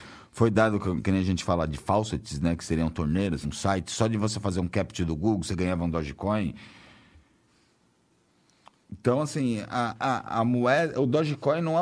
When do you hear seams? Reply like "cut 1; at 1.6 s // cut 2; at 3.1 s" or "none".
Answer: cut 1; at 3.4 s